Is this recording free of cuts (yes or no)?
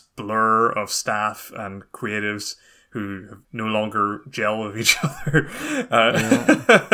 no